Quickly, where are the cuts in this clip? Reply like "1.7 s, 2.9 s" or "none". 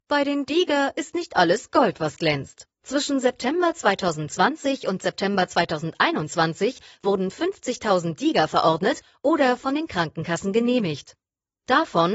2.7 s